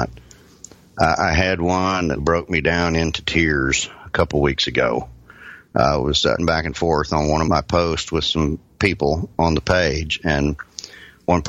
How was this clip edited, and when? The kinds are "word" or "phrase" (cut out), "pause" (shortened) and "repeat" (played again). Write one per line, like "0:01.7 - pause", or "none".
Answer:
0:02.2 - word
0:06.4 - word
0:07.4 - word